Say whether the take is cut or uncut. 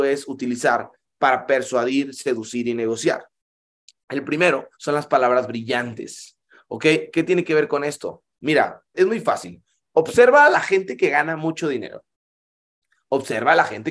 cut